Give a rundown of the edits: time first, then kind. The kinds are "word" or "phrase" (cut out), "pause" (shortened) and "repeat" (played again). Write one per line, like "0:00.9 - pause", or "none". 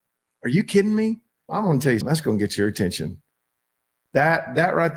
0:01.5 - word
0:02.0 - word